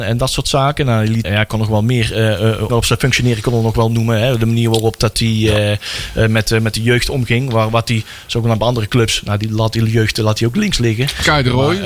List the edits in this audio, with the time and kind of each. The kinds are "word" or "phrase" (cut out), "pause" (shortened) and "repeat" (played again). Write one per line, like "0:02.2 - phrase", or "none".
0:01.2 - word
0:02.7 - phrase